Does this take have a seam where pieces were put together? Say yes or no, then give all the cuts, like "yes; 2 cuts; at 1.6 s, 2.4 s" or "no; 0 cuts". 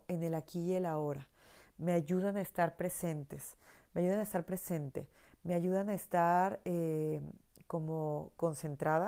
no; 0 cuts